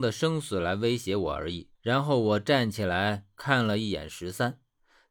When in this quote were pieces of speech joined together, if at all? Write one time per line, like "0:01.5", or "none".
0:01.7